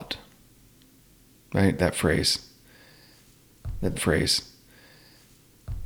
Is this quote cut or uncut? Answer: cut